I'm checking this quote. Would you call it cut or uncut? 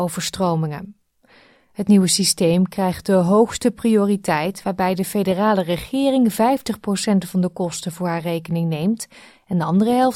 uncut